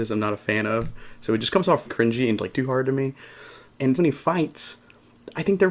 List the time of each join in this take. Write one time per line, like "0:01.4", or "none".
0:01.9
0:02.5
0:04.0